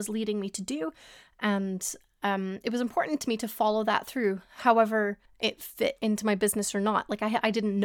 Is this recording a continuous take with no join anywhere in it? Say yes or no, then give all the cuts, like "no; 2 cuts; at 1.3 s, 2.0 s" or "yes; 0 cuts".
no; 1 cut; at 5.3 s